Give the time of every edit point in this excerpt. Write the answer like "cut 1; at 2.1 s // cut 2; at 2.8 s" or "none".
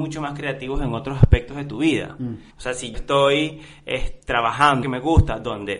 cut 1; at 2.5 s // cut 2; at 2.9 s // cut 3; at 4.8 s

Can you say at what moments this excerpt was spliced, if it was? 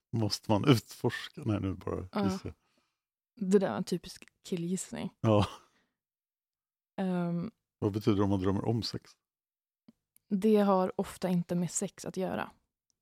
none

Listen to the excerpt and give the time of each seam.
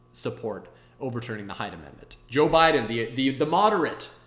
none

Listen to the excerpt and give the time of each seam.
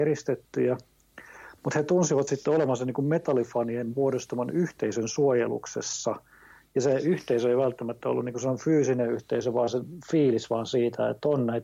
none

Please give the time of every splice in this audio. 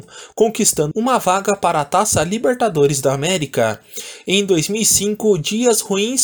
cut 1; at 0.9 s

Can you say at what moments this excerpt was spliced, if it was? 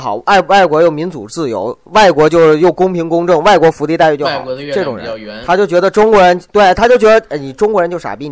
cut 1; at 6.5 s

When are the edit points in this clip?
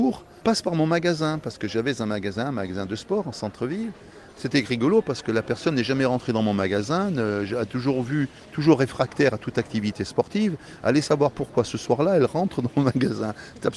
none

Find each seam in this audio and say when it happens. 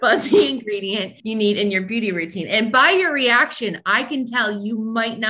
cut 1; at 1.2 s

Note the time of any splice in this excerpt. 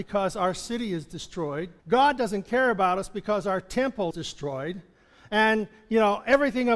cut 1; at 1.8 s // cut 2; at 4.1 s

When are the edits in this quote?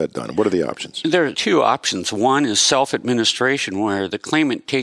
cut 1; at 1.3 s

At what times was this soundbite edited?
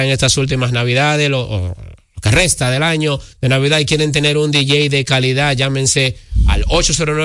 cut 1; at 3.3 s

